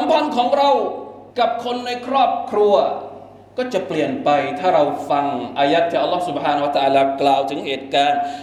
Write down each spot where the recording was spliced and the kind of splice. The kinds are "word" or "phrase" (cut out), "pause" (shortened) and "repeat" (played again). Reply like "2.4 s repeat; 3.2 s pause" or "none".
1.3 s pause